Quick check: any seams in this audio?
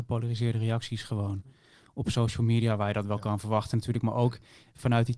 no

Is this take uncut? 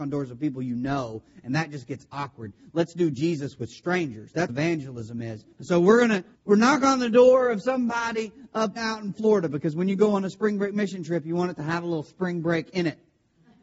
no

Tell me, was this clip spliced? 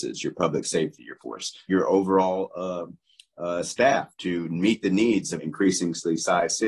yes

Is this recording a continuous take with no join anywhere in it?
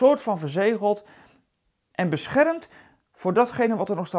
yes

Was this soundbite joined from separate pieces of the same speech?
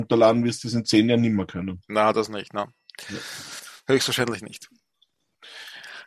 no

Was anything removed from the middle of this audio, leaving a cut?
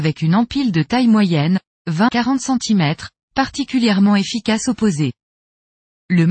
yes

